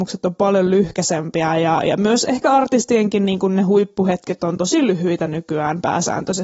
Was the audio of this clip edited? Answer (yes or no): no